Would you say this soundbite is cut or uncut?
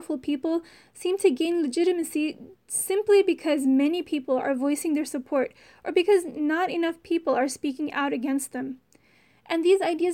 uncut